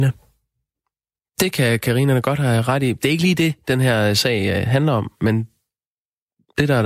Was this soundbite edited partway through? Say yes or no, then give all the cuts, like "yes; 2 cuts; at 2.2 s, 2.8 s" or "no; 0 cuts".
no; 0 cuts